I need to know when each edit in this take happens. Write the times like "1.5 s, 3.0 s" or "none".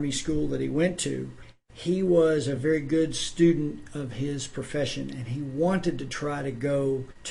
none